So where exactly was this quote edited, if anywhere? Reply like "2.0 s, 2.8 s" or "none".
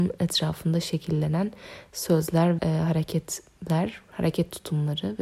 2.6 s